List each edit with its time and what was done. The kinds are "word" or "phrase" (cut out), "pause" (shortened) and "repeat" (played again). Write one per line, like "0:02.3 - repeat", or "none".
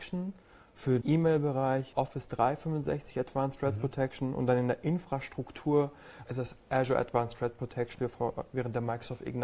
0:01.0 - word
0:01.9 - word
0:06.3 - word
0:08.0 - word